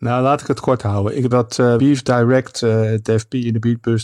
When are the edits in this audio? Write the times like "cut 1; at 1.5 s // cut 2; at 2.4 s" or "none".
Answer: cut 1; at 1.3 s // cut 2; at 1.8 s